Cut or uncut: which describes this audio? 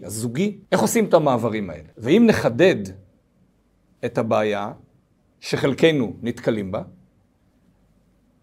uncut